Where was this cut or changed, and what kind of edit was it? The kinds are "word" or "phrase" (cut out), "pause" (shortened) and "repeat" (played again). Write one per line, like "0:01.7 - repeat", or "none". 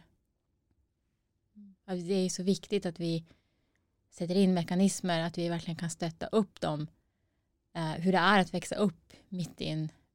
none